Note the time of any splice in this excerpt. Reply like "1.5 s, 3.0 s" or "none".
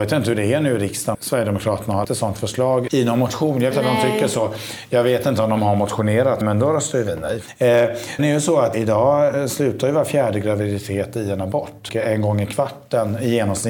1.1 s, 2.0 s, 2.9 s, 3.7 s, 6.4 s, 8.2 s, 8.7 s, 11.9 s